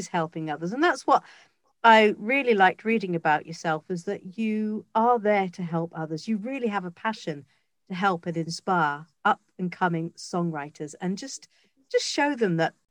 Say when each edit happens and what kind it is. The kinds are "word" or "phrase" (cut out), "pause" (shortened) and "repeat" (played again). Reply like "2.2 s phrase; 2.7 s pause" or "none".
none